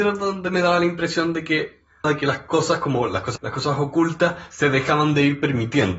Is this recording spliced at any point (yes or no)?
yes